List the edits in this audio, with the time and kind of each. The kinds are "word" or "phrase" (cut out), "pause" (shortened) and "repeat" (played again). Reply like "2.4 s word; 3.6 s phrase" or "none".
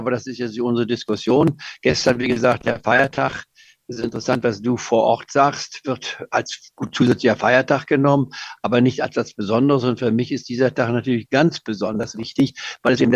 none